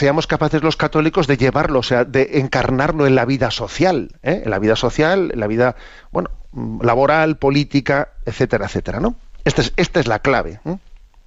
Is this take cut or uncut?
uncut